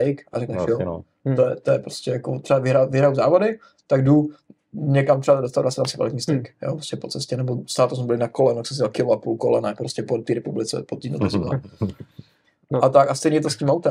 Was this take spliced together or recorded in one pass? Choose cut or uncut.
uncut